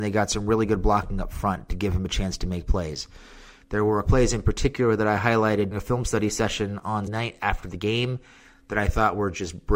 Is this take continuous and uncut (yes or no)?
no